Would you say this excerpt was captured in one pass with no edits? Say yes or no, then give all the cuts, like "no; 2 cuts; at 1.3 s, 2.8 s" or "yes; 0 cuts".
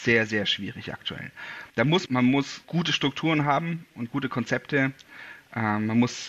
no; 3 cuts; at 1.7 s, 2.1 s, 2.6 s